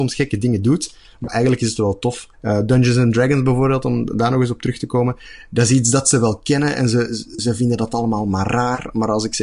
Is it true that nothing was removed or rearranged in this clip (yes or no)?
no